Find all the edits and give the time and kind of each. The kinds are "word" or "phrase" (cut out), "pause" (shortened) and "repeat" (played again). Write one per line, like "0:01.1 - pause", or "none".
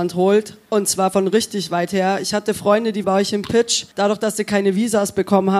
0:03.0 - word
0:03.9 - pause